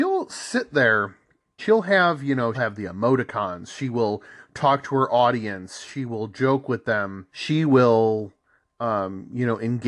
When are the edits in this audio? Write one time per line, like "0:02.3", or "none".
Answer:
0:01.6
0:02.5
0:07.3